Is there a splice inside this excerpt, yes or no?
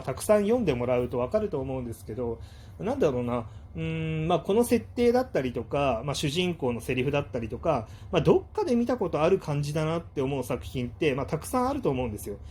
no